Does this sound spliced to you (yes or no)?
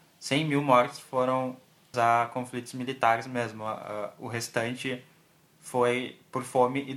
yes